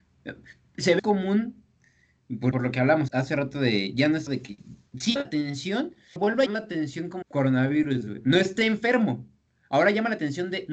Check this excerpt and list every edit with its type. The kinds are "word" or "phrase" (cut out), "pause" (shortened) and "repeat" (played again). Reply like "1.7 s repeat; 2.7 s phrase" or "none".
1.0 s word; 2.5 s word; 3.1 s word; 4.3 s word; 5.2 s word; 6.2 s word; 6.5 s word; 7.2 s word